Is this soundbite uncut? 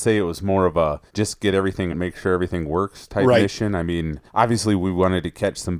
no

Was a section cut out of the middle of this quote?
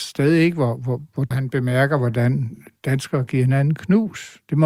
yes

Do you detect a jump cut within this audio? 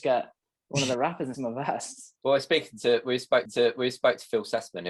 yes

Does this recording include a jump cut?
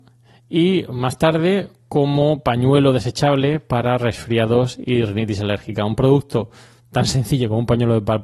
no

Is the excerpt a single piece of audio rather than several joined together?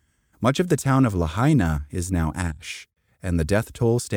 yes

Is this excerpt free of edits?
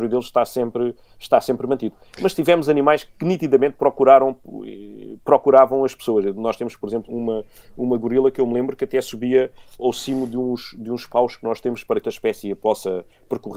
no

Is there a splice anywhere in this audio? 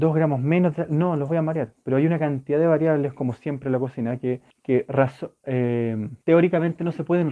yes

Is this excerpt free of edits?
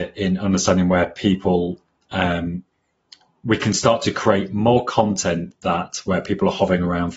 yes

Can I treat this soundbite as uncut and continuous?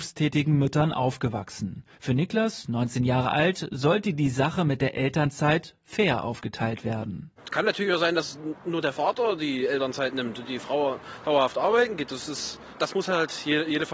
no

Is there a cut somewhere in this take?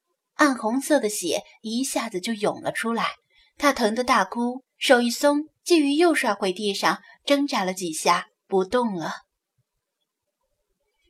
yes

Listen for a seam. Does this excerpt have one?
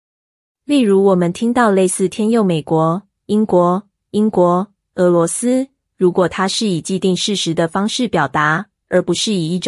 yes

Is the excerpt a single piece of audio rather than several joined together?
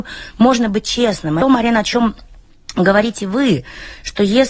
no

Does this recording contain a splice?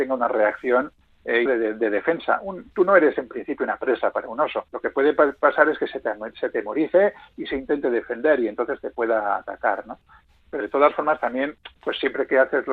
yes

